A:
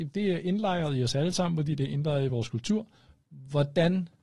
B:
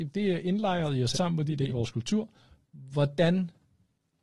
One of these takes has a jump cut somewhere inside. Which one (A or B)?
B